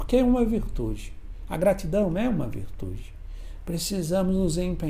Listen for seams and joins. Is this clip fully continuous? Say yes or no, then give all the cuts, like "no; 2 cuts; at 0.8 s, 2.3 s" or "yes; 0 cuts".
yes; 0 cuts